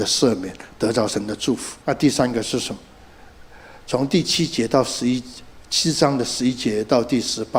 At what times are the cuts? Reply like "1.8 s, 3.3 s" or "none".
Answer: 1.8 s